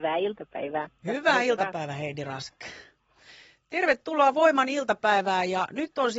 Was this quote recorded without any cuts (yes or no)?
yes